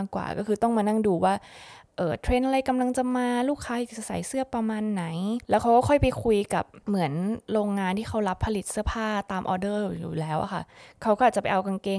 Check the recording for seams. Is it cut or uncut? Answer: cut